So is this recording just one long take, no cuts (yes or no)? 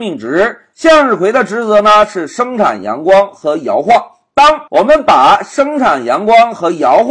no